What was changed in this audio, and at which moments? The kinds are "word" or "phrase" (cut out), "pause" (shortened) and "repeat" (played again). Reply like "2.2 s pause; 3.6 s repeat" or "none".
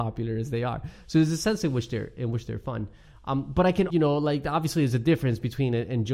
3.9 s word